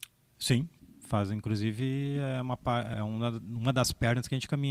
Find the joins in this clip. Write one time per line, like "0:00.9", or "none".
0:02.9